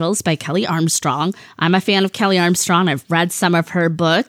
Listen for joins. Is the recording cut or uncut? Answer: uncut